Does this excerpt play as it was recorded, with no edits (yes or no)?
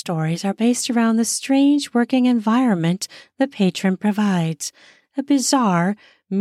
yes